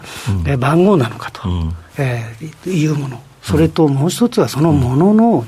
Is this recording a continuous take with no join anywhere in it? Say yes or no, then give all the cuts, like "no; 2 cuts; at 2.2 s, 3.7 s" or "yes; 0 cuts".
no; 1 cut; at 1.9 s